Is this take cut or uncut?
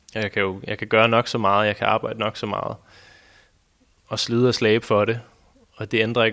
uncut